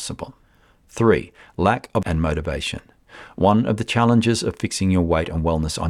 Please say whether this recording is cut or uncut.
cut